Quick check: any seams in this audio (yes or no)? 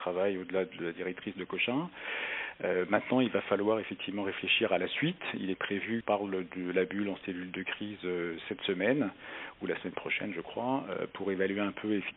yes